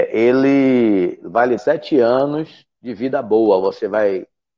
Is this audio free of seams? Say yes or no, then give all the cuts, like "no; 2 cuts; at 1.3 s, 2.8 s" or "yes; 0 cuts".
no; 2 cuts; at 1.6 s, 2.7 s